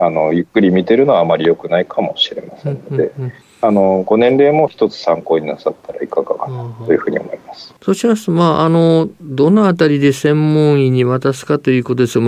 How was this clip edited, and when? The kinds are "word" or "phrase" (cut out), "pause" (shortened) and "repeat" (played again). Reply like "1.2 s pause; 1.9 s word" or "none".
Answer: 7.8 s pause

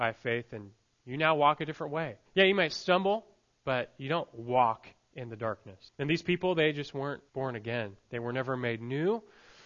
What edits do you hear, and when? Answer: 2.3 s pause; 5.9 s pause; 7.3 s pause

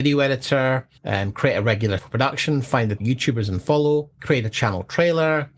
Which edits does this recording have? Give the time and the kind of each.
1.0 s pause; 2.0 s word; 3.0 s word; 4.1 s pause

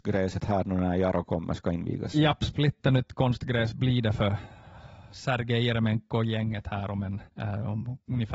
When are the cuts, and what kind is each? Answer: 7.3 s pause

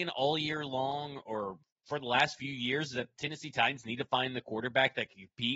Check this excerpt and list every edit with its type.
none

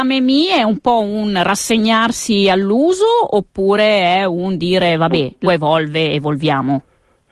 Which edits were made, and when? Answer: 5.5 s word

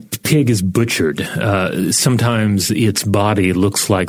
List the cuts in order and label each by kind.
none

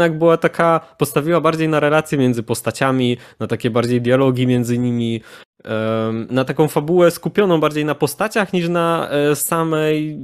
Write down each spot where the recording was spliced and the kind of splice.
6.3 s word

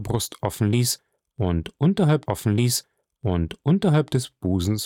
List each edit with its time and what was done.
2.3 s repeat

